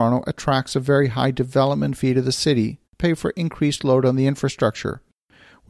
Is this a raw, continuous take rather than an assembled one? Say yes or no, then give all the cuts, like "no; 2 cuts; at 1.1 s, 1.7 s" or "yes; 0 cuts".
no; 1 cut; at 2.8 s